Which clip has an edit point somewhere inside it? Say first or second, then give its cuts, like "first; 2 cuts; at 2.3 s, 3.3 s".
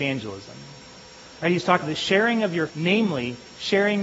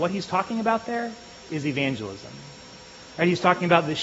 first; 2 cuts; at 1.8 s, 2.7 s